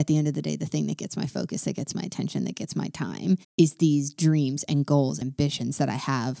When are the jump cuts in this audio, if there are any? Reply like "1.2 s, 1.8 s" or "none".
3.4 s, 5.2 s

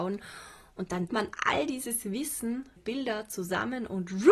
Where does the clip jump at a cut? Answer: 1.1 s, 2.8 s

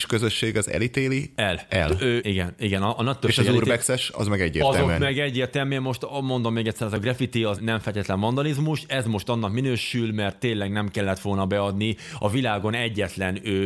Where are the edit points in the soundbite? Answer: 2.2 s, 7.6 s

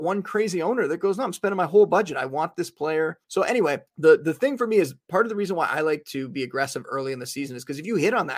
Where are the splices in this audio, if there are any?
3.2 s, 3.9 s

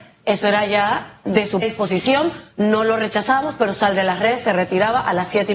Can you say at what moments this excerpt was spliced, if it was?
1.6 s

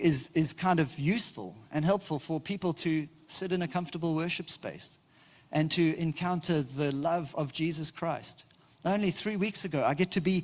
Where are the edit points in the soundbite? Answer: none

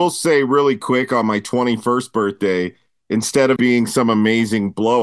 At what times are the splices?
3.6 s

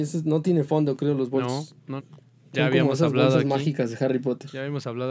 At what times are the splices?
2.0 s

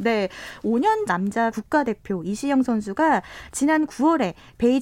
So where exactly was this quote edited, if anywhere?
1.1 s, 1.5 s

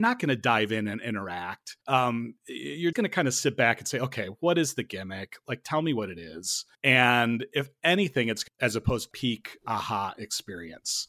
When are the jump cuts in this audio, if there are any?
1.8 s, 2.9 s, 6.7 s, 8.5 s, 9.1 s

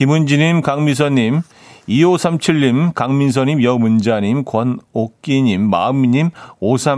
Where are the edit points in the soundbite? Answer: none

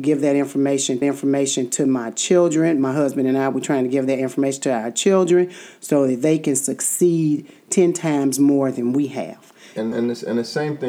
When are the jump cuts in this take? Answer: 1.0 s, 9.9 s

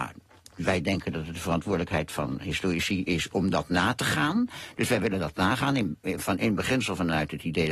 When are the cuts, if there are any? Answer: none

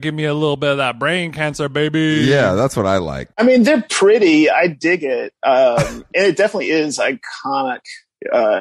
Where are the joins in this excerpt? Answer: none

